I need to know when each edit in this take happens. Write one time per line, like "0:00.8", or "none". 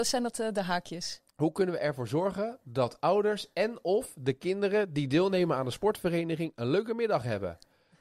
0:01.3